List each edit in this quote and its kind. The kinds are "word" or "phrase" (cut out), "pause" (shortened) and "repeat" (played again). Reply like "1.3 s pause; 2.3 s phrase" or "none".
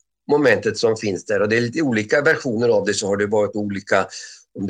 none